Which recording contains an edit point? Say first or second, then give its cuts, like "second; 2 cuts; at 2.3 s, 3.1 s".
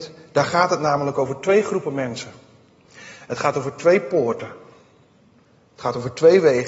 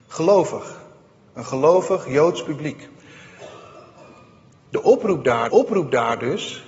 second; 1 cut; at 5.5 s